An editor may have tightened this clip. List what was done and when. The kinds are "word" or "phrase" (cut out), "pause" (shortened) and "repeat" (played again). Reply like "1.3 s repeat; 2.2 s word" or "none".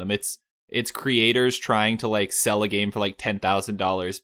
none